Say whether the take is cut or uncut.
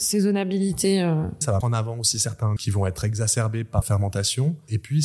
cut